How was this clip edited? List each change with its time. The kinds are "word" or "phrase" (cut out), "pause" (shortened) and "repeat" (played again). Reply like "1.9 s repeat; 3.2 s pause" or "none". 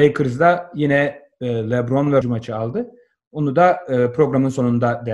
2.2 s phrase